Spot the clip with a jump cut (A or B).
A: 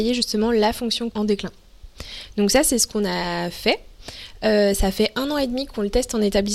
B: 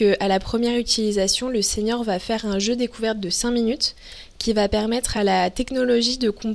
A